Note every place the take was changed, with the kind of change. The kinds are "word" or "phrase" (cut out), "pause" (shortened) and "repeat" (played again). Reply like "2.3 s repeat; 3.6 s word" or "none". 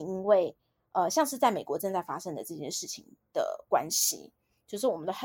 none